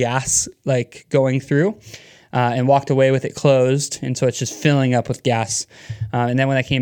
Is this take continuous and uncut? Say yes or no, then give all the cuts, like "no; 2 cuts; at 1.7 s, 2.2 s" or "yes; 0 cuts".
yes; 0 cuts